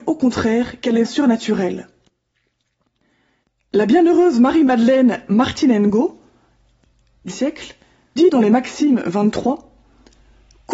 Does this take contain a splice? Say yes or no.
yes